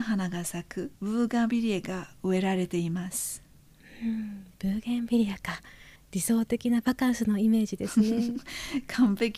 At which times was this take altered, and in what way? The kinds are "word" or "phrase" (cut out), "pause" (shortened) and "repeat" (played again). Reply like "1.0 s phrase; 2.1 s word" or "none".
0.9 s pause; 4.5 s pause; 6.0 s pause

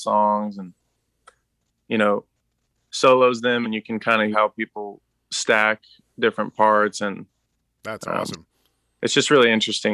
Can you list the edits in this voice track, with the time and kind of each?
3.6 s word; 4.3 s word

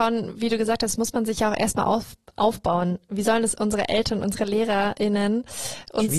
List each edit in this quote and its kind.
none

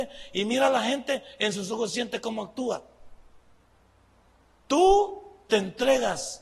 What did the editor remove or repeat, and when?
none

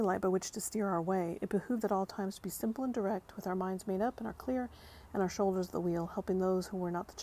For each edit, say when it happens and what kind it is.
1.8 s word; 4.3 s word

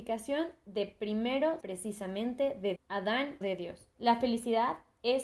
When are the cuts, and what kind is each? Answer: 1.6 s word; 2.8 s word; 3.4 s word; 3.9 s pause

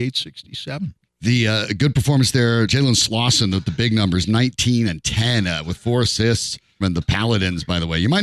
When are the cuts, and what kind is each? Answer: 1.0 s pause; 2.7 s word; 6.8 s phrase

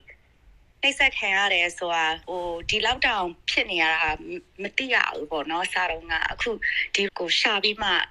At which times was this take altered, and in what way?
2.2 s pause; 7.1 s word

